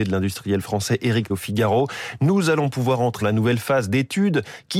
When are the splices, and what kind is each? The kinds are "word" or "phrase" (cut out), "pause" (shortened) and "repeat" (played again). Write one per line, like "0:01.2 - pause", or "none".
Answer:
0:01.3 - word
0:03.2 - word